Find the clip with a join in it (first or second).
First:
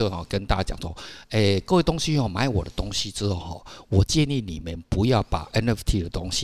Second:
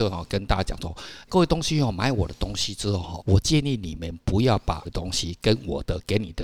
second